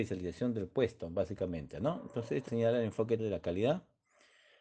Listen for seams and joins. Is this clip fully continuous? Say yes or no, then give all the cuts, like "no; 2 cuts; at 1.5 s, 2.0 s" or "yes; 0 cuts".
no; 2 cuts; at 2.5 s, 3.2 s